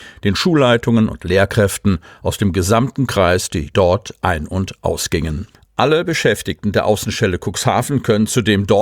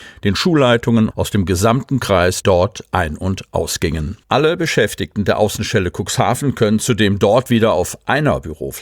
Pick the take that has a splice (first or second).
second